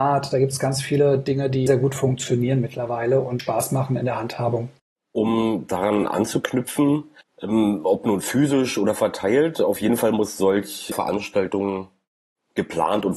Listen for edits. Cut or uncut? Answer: cut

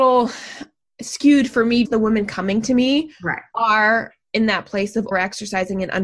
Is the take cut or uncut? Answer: cut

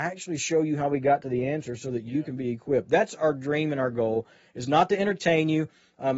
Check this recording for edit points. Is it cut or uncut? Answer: uncut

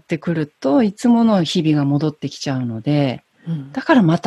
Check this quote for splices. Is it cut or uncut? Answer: uncut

